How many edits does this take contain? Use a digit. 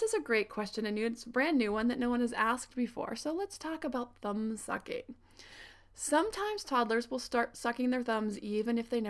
0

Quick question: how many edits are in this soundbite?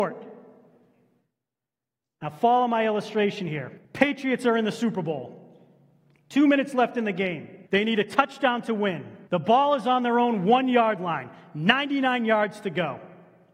3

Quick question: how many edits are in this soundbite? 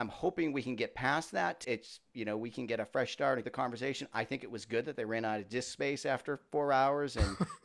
2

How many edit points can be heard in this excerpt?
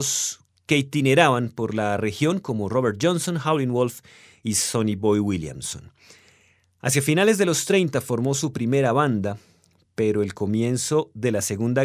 0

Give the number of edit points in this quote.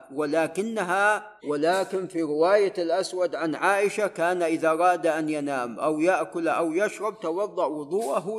1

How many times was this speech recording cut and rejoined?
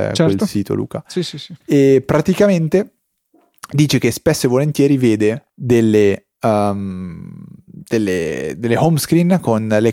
2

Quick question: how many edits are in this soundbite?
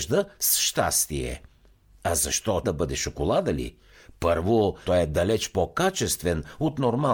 2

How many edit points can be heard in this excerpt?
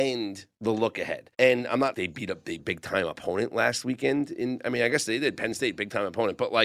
3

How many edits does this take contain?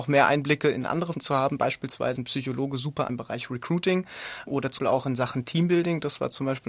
5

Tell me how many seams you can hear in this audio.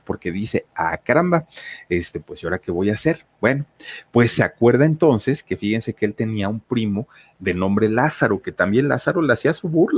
0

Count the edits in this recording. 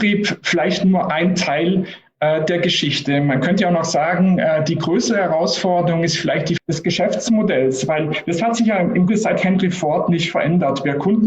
2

